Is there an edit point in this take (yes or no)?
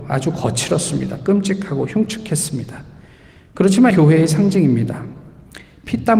yes